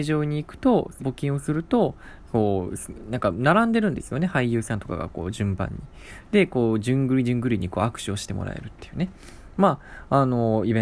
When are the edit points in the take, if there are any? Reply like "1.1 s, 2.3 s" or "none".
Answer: 1.0 s